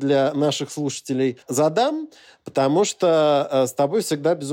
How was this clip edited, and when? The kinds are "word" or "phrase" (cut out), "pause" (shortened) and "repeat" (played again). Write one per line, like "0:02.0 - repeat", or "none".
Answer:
0:01.4 - pause